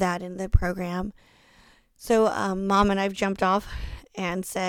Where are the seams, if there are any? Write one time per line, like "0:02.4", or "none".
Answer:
none